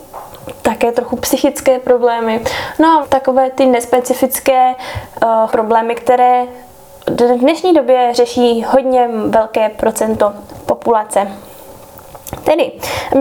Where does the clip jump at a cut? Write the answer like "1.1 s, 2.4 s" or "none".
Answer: 3.0 s, 5.5 s